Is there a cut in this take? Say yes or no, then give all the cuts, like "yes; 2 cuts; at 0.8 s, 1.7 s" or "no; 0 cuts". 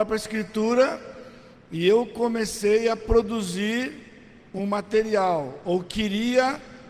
no; 0 cuts